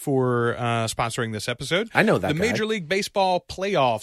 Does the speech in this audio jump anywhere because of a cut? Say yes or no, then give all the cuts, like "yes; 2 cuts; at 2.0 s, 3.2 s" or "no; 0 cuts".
no; 0 cuts